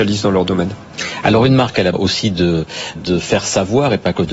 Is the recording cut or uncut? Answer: cut